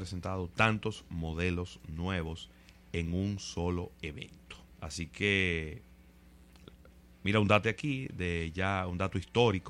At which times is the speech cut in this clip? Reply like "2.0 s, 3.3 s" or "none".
4.7 s, 7.6 s